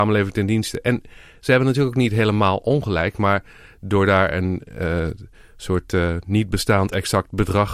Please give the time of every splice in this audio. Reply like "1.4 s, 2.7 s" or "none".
none